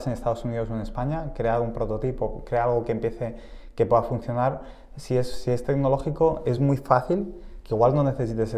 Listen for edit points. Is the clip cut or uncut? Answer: uncut